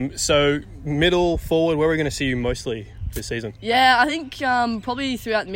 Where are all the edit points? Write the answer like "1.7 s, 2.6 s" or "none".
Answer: none